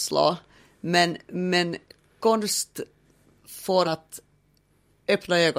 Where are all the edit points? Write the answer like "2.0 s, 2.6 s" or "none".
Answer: 3.8 s